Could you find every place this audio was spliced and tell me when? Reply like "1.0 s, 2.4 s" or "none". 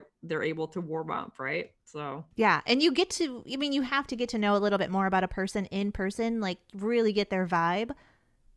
2.3 s